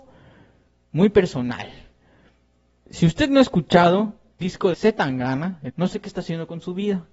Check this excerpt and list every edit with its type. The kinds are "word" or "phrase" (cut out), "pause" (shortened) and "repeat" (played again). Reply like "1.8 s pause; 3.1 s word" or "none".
4.4 s word; 4.7 s word; 5.7 s word